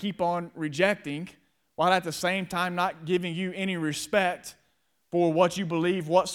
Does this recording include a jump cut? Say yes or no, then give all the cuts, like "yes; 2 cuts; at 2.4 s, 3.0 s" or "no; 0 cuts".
no; 0 cuts